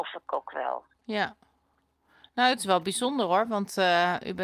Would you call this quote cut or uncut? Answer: uncut